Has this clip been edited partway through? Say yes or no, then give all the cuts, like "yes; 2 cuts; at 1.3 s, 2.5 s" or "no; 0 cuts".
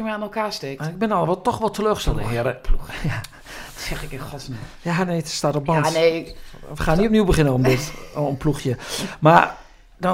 no; 0 cuts